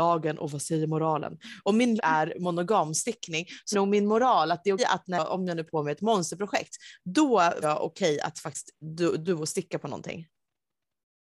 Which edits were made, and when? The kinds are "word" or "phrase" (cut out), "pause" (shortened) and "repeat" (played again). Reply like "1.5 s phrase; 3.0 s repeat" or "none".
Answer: 2.0 s word; 3.7 s word; 4.8 s word; 5.7 s word; 7.6 s word; 8.8 s word; 9.3 s word